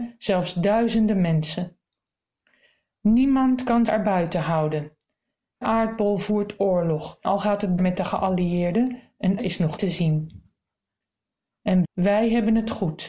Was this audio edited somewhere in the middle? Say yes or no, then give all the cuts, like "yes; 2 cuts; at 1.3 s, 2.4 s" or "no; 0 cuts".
yes; 7 cuts; at 3.9 s, 5.6 s, 7.2 s, 7.8 s, 9.4 s, 9.8 s, 11.8 s